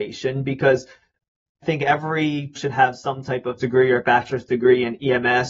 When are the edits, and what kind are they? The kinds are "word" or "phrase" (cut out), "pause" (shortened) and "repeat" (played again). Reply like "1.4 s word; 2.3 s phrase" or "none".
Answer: 1.6 s word; 2.6 s word; 3.6 s word